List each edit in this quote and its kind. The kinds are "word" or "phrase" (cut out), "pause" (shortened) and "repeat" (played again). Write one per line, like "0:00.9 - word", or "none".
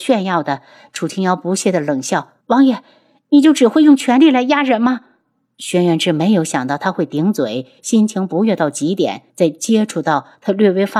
0:02.4 - pause
0:09.3 - pause